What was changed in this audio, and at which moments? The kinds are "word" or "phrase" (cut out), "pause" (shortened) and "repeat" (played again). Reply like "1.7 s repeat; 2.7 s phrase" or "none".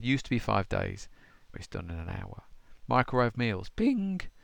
1.5 s word